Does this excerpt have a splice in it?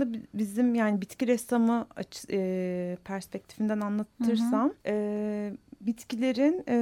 yes; 1 cut; at 4.8 s

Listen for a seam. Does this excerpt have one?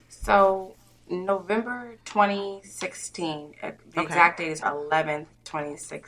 yes; 1 cut; at 4.6 s

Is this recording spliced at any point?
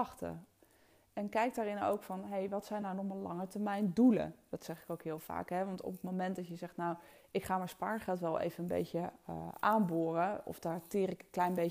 no; 0 cuts

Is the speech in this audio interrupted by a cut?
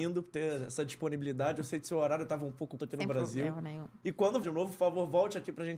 yes; 2 cuts; at 2.8 s, 4.4 s

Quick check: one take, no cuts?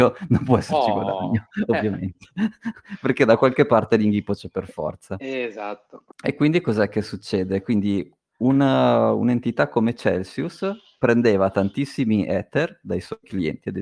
no; 1 cut; at 6.1 s

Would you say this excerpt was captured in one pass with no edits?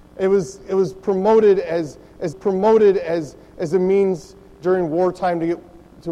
no; 1 cut; at 2.3 s

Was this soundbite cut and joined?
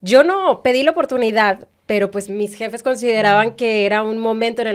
no; 0 cuts

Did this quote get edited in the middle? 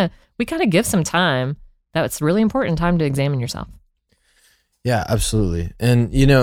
no; 0 cuts

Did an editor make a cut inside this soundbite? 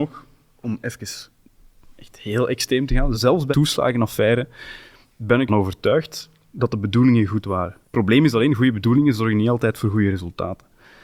yes; 4 cuts; at 3.1 s, 3.5 s, 5.5 s, 7.8 s

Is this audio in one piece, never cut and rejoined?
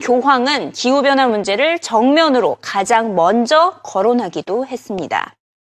yes; 0 cuts

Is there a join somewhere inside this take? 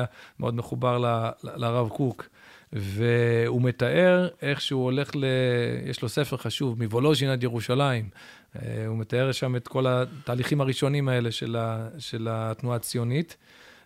no; 0 cuts

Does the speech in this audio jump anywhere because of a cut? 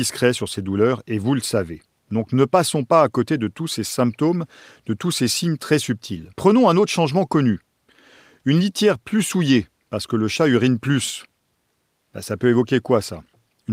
yes; 1 cut; at 6.3 s

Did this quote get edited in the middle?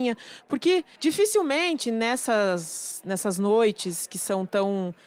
no; 0 cuts

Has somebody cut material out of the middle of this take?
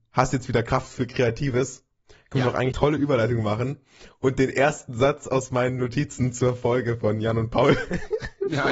yes; 1 cut; at 2.7 s

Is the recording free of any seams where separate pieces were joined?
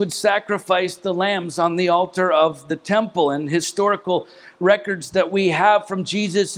yes; 0 cuts

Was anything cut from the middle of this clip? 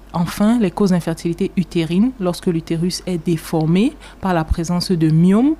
no; 0 cuts

